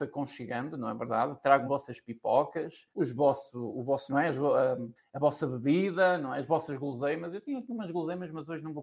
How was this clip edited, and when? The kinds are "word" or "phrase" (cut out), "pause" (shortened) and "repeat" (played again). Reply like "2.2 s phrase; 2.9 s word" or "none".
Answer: 1.7 s word; 2.9 s pause; 4.1 s phrase; 5.0 s pause

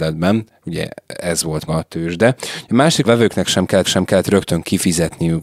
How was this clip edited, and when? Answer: 1.7 s word; 3.0 s phrase; 3.8 s repeat

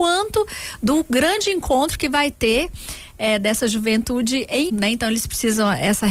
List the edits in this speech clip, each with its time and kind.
4.7 s word

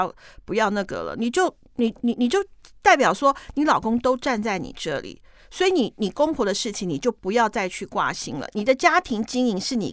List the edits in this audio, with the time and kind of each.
none

